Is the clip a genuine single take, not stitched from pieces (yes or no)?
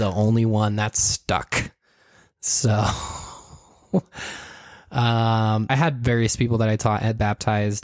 no